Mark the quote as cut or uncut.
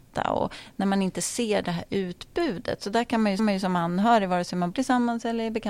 cut